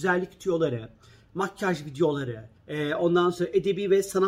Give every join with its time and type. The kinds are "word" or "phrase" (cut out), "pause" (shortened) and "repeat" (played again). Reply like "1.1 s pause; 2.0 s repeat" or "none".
2.6 s pause